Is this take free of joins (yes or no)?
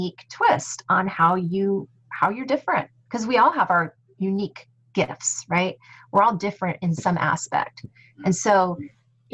yes